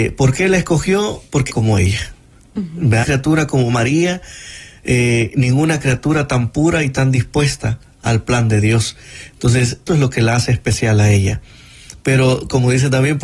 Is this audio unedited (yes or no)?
no